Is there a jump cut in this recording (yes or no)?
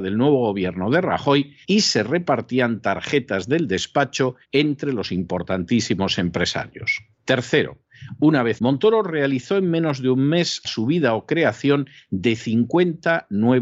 yes